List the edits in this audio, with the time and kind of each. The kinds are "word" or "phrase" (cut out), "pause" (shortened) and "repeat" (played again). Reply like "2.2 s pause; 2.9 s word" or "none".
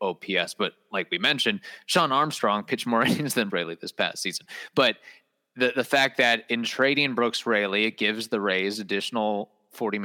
3.5 s word